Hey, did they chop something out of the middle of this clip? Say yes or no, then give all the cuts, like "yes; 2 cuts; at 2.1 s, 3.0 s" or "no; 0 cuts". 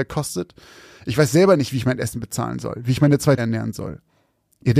yes; 1 cut; at 3.4 s